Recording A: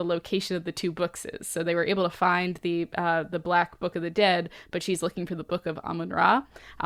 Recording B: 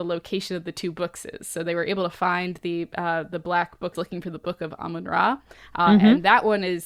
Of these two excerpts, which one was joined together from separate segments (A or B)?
B